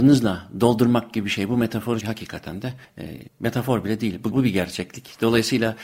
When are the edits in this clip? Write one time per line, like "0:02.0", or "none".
0:02.0
0:04.3